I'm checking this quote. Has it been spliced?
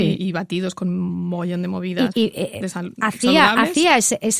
yes; 1 cut; at 2.1 s

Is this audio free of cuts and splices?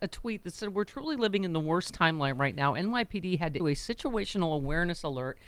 no; 1 cut; at 3.6 s

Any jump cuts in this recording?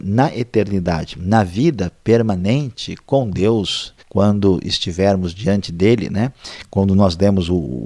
yes; 1 cut; at 4.0 s

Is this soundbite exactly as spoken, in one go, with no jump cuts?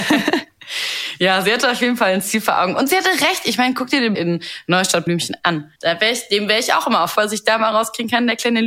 no; 4 cuts; at 4.1 s, 5.1 s, 5.8 s, 7.2 s

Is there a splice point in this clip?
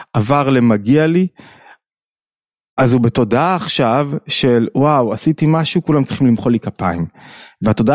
no; 0 cuts

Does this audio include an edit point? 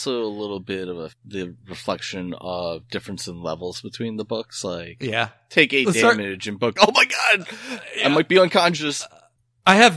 yes; 2 cuts; at 1.1 s, 6.8 s

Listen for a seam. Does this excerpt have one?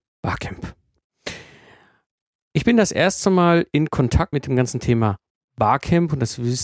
yes; 1 cut; at 4.3 s

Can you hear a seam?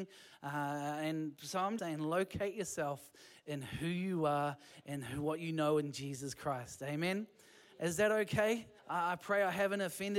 yes; 2 cuts; at 1.8 s, 8.8 s

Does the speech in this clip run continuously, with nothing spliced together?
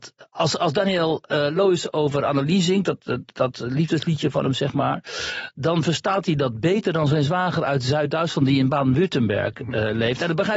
yes; 0 cuts

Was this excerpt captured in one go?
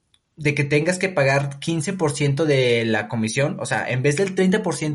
yes; 0 cuts

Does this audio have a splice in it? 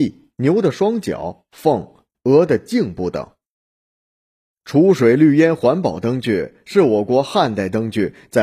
yes; 1 cut; at 2.1 s

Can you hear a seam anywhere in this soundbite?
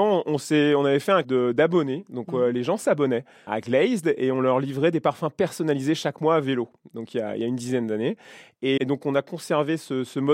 yes; 3 cuts; at 1.2 s, 3.5 s, 8.8 s

